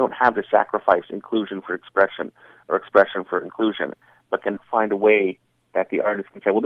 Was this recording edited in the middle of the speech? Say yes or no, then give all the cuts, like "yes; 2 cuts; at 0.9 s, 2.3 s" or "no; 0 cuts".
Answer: no; 0 cuts